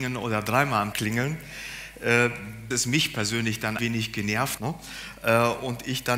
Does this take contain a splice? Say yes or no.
yes